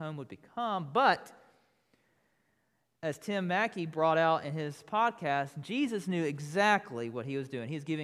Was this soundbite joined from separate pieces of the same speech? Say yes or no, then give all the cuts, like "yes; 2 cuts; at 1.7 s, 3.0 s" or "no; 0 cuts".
no; 0 cuts